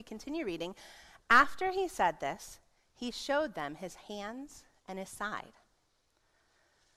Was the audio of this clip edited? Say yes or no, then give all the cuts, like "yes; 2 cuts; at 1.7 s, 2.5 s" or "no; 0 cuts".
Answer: no; 0 cuts